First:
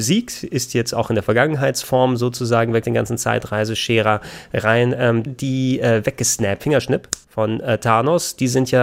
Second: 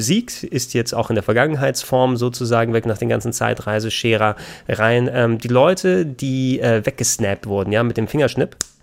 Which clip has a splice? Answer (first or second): first